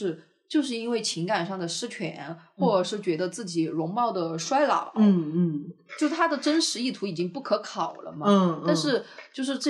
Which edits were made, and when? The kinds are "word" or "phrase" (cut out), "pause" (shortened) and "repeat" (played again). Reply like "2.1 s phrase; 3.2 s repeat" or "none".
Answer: none